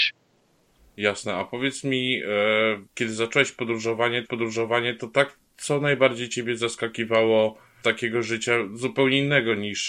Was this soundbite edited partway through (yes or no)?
yes